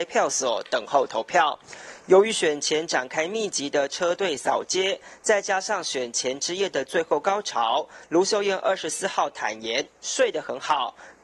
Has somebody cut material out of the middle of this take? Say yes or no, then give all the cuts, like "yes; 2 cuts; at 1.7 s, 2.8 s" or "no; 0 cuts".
no; 0 cuts